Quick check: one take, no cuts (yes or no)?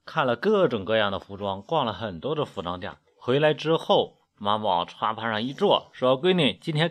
no